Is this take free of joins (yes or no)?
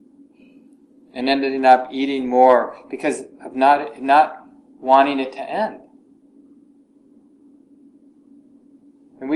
yes